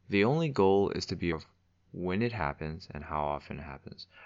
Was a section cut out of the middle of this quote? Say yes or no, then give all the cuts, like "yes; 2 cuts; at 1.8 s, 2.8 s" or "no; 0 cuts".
yes; 1 cut; at 1.3 s